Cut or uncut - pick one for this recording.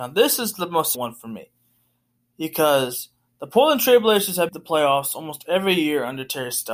cut